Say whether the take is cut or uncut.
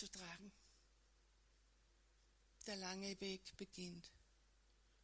uncut